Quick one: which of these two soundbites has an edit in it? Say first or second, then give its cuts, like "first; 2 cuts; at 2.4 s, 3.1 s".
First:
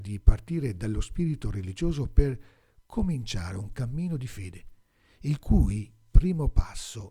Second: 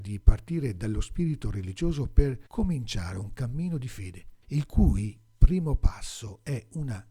second; 2 cuts; at 2.5 s, 4.4 s